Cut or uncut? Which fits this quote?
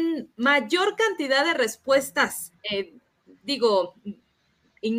cut